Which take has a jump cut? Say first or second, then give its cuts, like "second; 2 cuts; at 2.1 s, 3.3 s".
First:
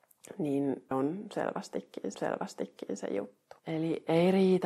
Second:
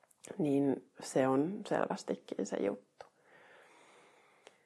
first; 3 cuts; at 0.9 s, 2.1 s, 3.6 s